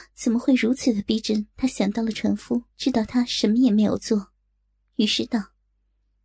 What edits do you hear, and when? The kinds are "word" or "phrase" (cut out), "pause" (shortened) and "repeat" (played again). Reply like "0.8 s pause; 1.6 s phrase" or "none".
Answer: 1.5 s pause; 2.7 s pause